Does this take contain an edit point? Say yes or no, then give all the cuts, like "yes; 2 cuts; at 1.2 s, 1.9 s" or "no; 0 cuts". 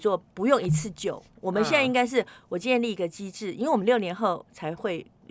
no; 0 cuts